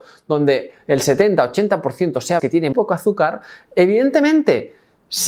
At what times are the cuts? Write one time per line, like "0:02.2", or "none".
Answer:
0:02.4
0:02.7